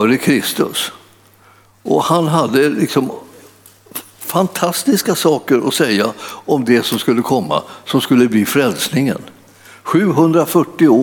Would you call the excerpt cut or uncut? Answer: uncut